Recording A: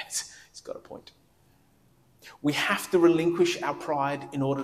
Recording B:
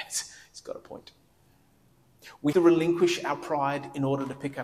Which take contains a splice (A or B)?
B